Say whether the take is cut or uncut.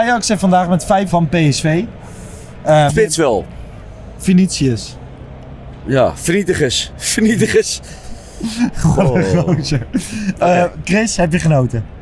cut